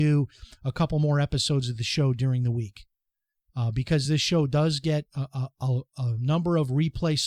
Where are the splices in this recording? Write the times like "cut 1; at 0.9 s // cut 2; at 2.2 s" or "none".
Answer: none

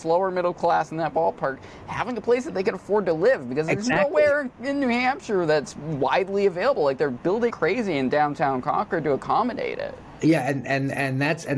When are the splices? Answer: cut 1; at 7.5 s

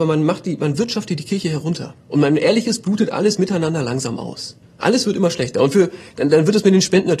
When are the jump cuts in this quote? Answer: cut 1; at 2.0 s // cut 2; at 4.6 s

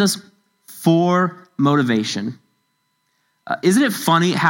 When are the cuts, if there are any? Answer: none

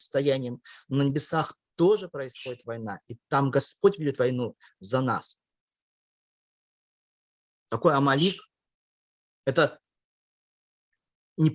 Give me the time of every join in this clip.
none

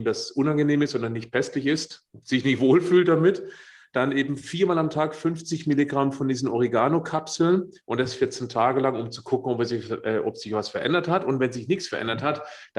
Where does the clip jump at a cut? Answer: none

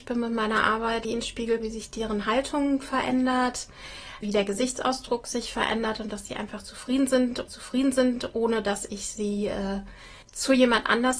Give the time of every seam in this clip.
cut 1; at 1.0 s // cut 2; at 1.6 s // cut 3; at 4.2 s // cut 4; at 7.5 s // cut 5; at 10.2 s

